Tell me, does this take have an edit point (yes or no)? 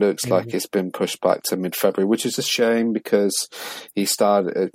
no